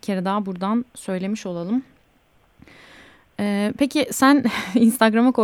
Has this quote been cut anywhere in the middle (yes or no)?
no